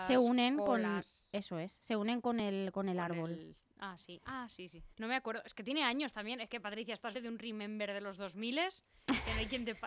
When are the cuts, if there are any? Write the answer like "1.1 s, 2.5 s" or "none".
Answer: 4.9 s, 7.1 s

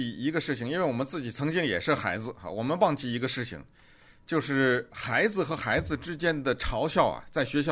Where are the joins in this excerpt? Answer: none

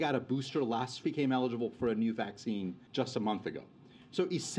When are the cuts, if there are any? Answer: 1.0 s, 2.9 s

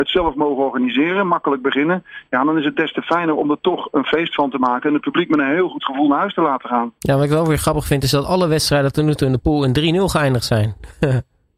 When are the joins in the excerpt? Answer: 7.0 s

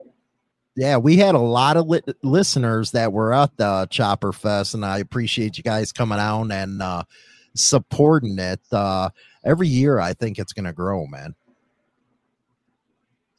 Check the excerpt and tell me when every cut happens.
none

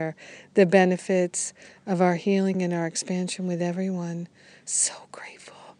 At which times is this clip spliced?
none

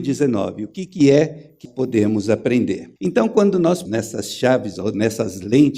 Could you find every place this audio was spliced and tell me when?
1.6 s, 3.0 s, 3.9 s, 4.8 s

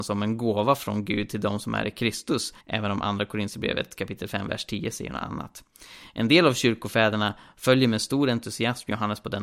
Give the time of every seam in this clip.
2.6 s

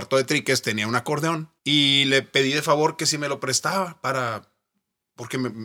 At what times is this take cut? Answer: 1.6 s

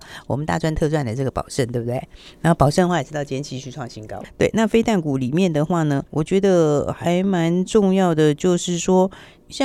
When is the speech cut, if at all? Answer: 6.1 s

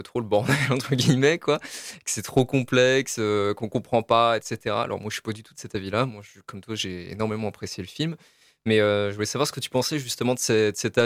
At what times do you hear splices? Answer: none

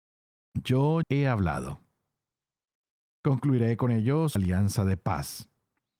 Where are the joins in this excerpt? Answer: 1.0 s, 4.4 s

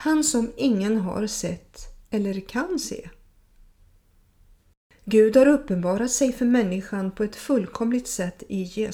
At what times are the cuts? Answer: none

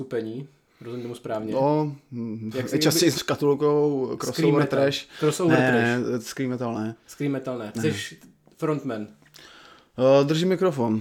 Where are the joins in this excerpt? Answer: 2.7 s, 3.1 s

